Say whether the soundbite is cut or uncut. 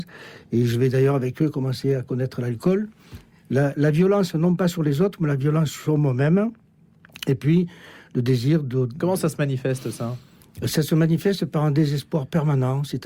uncut